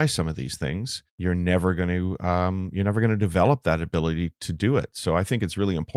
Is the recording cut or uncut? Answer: cut